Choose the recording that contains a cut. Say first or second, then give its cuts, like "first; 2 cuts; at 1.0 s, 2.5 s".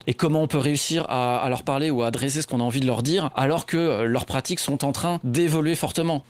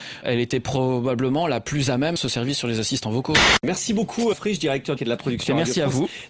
second; 3 cuts; at 2.2 s, 4.3 s, 5.0 s